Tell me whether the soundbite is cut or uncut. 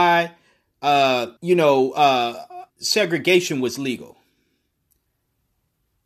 cut